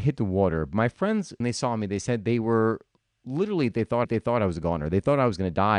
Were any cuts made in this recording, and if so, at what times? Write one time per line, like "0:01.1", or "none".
0:01.4
0:04.0